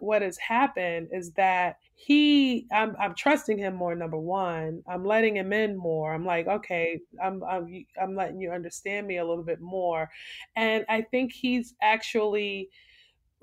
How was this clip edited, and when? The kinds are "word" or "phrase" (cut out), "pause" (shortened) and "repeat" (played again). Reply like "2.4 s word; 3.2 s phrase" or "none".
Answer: 1.9 s pause